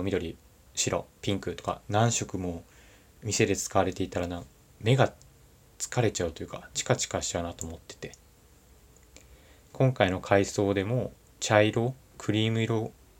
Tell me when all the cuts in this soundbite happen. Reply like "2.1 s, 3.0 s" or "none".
1.8 s